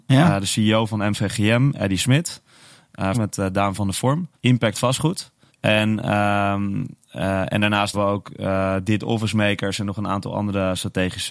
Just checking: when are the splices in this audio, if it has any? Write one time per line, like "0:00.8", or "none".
0:03.1
0:04.3
0:05.5
0:07.9